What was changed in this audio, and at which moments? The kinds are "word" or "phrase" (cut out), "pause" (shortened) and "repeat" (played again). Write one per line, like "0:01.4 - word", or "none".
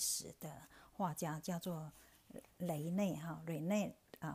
0:02.5 - pause